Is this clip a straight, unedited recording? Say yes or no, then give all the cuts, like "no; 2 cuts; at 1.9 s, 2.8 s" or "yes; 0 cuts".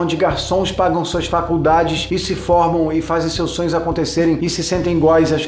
yes; 0 cuts